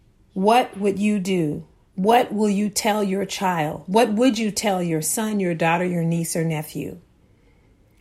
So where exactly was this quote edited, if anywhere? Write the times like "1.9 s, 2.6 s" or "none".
none